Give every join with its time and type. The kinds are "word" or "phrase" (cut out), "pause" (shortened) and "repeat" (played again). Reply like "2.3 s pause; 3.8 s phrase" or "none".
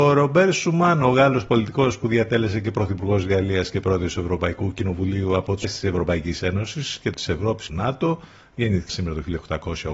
5.6 s word; 7.1 s word; 7.7 s phrase; 8.9 s word